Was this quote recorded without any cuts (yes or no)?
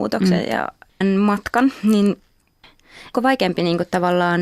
no